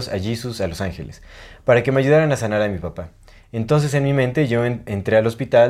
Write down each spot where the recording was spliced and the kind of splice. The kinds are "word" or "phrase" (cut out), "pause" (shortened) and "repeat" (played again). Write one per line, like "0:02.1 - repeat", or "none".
none